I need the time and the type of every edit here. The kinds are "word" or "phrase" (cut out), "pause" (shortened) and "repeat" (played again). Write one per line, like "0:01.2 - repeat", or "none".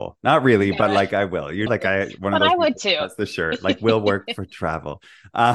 0:01.7 - word